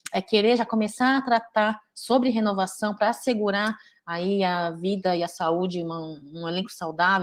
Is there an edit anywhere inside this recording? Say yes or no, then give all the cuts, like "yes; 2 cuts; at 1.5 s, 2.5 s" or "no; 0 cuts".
no; 0 cuts